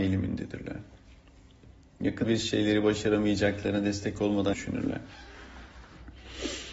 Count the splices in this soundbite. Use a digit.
2